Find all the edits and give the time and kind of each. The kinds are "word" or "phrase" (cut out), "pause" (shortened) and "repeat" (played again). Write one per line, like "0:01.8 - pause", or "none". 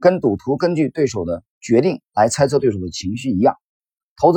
0:01.5 - pause

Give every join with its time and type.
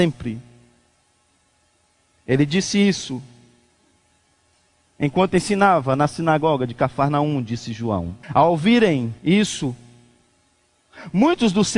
0:08.2 - pause
0:09.2 - pause

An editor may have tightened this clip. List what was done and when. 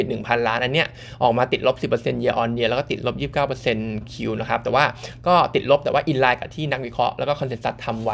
0:04.0 - phrase

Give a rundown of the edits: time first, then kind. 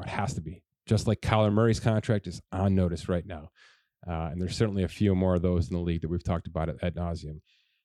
none

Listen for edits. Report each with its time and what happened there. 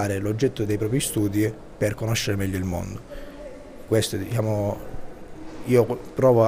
0:03.9 - word

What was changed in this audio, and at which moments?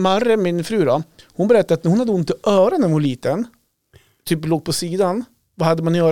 none

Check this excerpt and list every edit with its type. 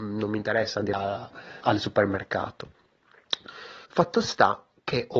0:00.9 - word
0:01.6 - word
0:03.9 - pause

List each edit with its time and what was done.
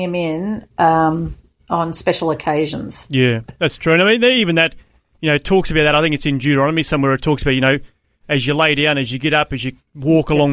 none

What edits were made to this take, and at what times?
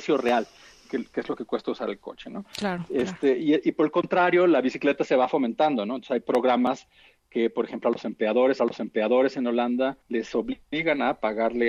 0:08.6 - repeat
0:10.0 - pause

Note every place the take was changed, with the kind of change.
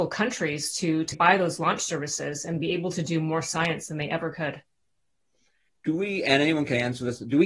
0:01.1 - word

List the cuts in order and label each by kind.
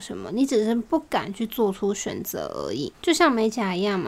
0:02.9 - pause

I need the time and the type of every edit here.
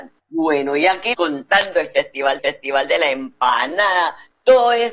0:01.1 - phrase
0:02.4 - repeat

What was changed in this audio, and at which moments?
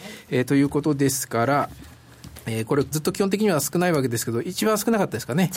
0:02.9 - phrase

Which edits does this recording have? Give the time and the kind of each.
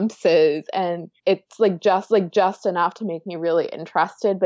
0:01.2 - pause
0:02.1 - repeat

